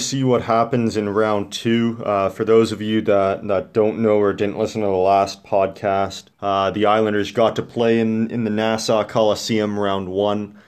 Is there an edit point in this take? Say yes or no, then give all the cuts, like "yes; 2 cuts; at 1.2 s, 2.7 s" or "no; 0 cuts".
yes; 1 cut; at 6.3 s